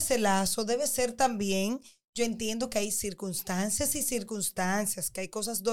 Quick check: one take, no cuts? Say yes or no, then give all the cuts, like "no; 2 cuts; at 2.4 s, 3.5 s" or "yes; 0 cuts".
yes; 0 cuts